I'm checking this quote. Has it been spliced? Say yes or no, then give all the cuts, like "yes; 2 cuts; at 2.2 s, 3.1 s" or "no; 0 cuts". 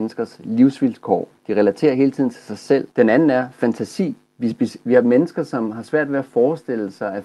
yes; 3 cuts; at 1.4 s, 2.9 s, 4.3 s